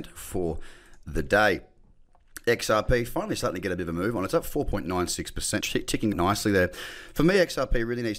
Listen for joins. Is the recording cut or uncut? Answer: cut